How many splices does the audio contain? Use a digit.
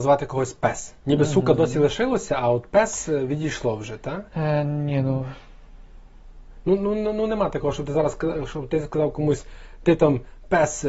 2